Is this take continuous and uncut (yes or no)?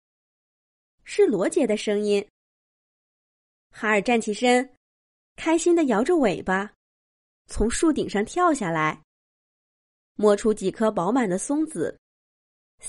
yes